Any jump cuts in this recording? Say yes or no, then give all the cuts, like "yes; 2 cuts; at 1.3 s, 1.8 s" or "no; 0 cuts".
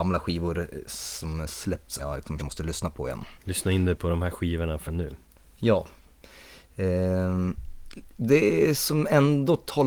yes; 4 cuts; at 2.0 s, 2.4 s, 3.4 s, 4.9 s